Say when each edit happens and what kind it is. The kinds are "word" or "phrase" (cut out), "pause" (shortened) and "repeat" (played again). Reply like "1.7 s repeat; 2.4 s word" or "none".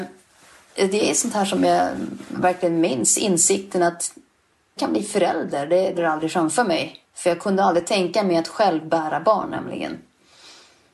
4.8 s phrase; 6.0 s phrase; 7.0 s pause